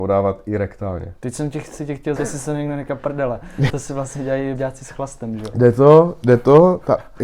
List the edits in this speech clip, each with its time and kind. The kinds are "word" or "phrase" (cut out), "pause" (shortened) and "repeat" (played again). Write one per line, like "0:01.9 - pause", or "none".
0:02.2 - word
0:03.0 - word
0:03.7 - word
0:04.6 - word

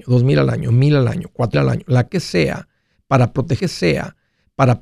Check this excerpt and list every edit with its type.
0:01.5 - word
0:02.1 - word
0:03.6 - repeat

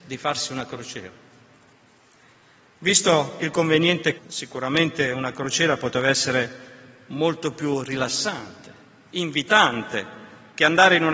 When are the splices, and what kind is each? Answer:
0:04.2 - word

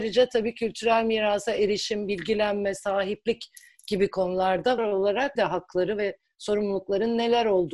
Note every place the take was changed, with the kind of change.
0:04.8 - word
0:05.4 - word

